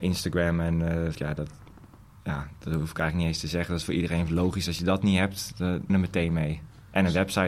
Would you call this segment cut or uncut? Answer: cut